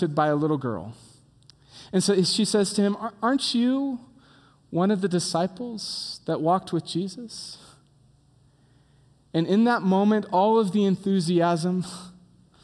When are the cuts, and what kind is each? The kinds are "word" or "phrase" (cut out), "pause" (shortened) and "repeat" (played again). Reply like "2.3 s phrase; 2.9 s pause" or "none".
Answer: none